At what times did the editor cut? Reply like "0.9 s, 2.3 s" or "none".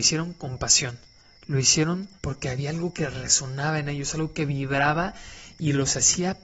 2.2 s